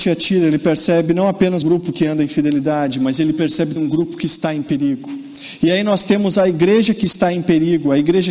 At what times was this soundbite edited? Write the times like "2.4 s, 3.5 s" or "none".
1.6 s, 3.8 s